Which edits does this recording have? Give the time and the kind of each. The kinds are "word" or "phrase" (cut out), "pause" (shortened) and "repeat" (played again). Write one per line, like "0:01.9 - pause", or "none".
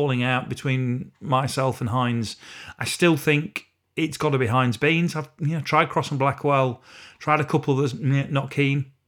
none